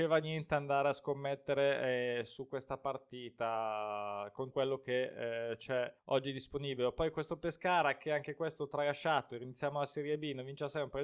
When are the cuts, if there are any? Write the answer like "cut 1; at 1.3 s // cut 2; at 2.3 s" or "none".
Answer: cut 1; at 4.5 s // cut 2; at 6.0 s

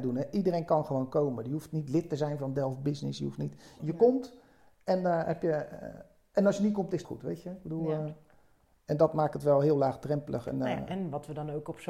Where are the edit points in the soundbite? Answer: cut 1; at 3.8 s // cut 2; at 7.0 s

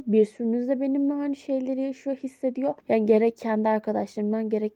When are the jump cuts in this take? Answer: cut 1; at 2.8 s

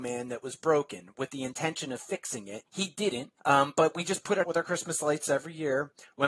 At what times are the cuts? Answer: cut 1; at 2.7 s // cut 2; at 3.4 s // cut 3; at 4.4 s

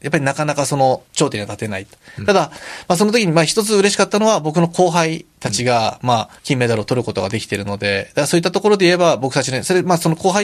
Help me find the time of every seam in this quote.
cut 1; at 1.1 s // cut 2; at 6.4 s

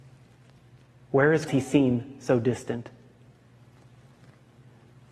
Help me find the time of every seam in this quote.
cut 1; at 1.5 s

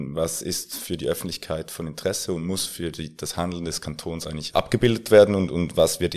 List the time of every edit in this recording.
none

